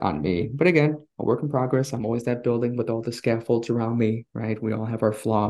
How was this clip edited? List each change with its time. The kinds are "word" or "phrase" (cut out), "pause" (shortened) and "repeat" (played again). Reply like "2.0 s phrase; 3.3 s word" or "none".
4.3 s pause